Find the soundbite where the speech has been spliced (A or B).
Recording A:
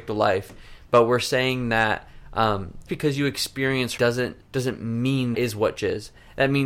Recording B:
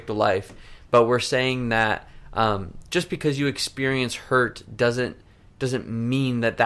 A